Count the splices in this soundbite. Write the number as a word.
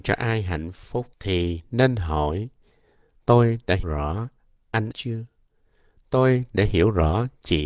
three